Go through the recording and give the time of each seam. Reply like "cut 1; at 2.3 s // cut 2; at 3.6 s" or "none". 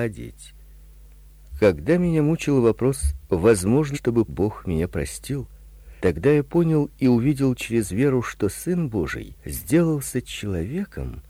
cut 1; at 3.9 s // cut 2; at 4.3 s // cut 3; at 6.0 s // cut 4; at 9.4 s

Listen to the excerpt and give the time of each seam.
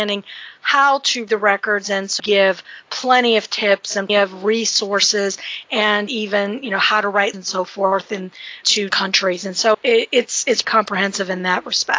cut 1; at 1.3 s // cut 2; at 2.2 s // cut 3; at 4.1 s // cut 4; at 6.1 s // cut 5; at 7.3 s // cut 6; at 8.9 s // cut 7; at 9.7 s // cut 8; at 10.6 s

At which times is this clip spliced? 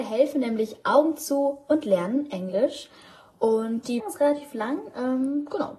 cut 1; at 4.0 s

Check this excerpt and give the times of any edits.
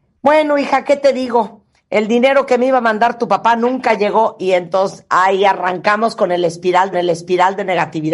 cut 1; at 6.9 s

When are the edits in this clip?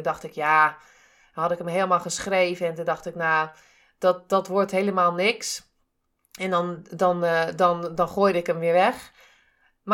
none

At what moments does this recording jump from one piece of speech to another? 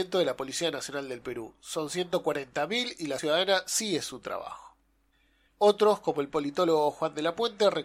cut 1; at 3.2 s

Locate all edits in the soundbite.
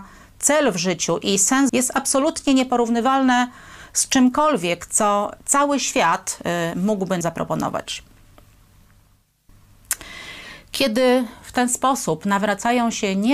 cut 1; at 1.7 s // cut 2; at 5.4 s // cut 3; at 7.2 s

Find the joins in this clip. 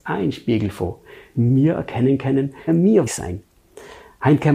cut 1; at 1.3 s // cut 2; at 2.7 s // cut 3; at 3.1 s

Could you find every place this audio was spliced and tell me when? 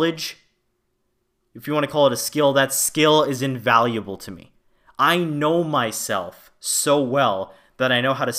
none

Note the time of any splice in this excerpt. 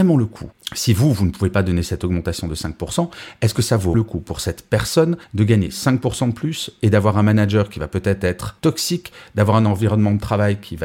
cut 1; at 3.9 s // cut 2; at 5.2 s

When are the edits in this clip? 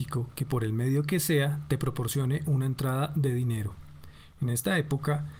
none

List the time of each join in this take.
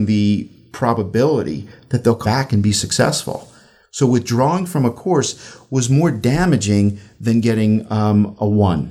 cut 1; at 2.2 s

